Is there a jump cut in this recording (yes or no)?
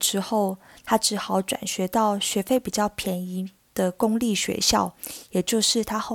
yes